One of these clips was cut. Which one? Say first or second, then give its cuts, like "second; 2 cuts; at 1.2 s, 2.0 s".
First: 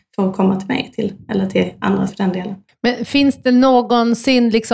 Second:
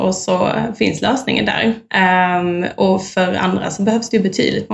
first; 3 cuts; at 1.2 s, 2.1 s, 2.7 s